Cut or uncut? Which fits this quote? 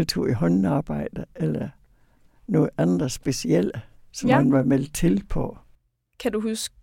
uncut